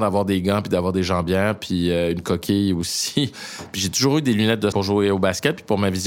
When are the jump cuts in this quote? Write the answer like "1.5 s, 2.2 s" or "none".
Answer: 4.7 s